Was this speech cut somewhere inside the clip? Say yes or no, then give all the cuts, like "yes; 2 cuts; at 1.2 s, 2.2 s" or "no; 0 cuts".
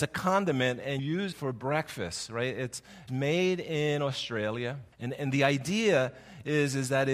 yes; 4 cuts; at 1.0 s, 1.3 s, 3.1 s, 4.9 s